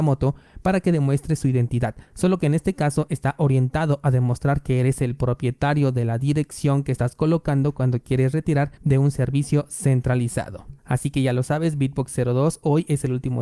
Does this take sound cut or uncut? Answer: cut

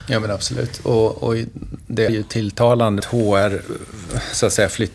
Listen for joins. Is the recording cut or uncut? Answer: cut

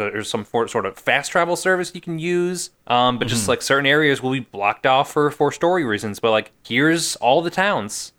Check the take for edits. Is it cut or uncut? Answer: cut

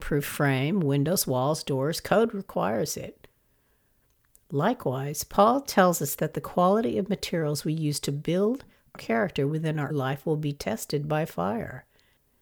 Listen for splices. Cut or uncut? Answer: cut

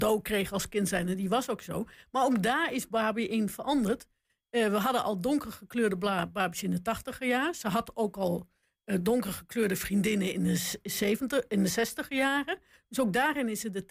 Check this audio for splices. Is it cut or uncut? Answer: uncut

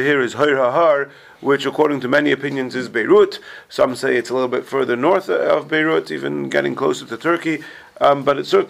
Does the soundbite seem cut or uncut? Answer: uncut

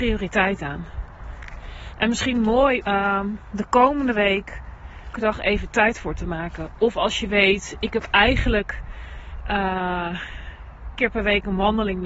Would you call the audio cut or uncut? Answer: cut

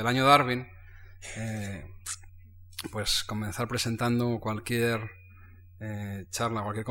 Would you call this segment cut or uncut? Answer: uncut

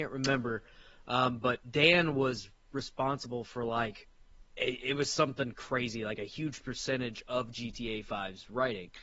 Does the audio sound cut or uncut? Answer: cut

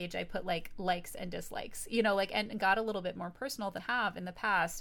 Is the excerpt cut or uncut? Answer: cut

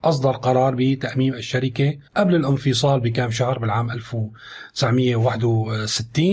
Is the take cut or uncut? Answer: cut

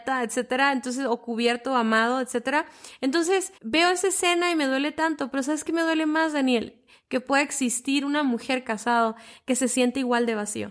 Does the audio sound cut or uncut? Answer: cut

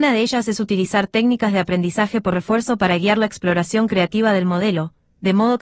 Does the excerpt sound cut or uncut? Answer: uncut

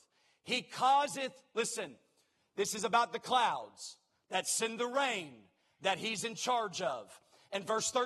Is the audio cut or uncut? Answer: uncut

